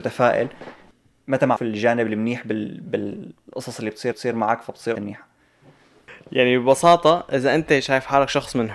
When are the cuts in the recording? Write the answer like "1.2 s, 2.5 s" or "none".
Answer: 1.6 s, 4.1 s, 4.9 s